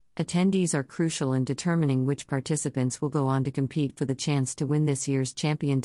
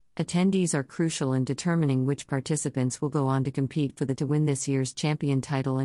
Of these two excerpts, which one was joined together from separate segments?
second; 1 cut; at 4.2 s

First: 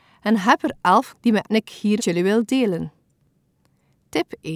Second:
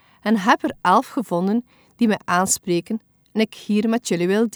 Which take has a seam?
first; 3 cuts; at 1.1 s, 1.5 s, 2.0 s

